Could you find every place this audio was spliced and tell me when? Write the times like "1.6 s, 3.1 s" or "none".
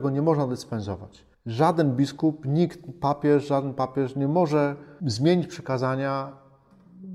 1.3 s